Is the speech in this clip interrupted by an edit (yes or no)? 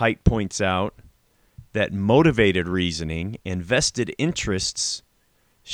no